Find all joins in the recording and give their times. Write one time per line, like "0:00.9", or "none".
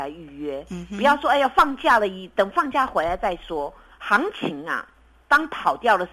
0:03.9

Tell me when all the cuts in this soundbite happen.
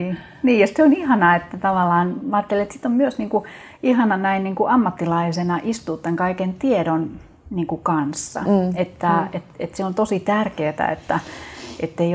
none

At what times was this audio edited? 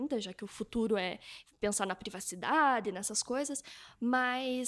none

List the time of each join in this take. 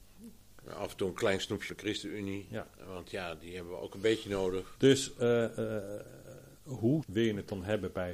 0:01.7
0:07.0

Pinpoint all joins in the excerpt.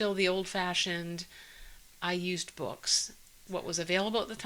0:03.5

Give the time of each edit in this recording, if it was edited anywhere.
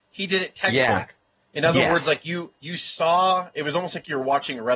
0:02.6

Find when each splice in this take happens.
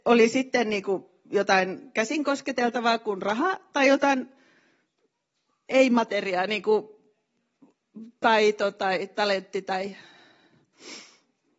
none

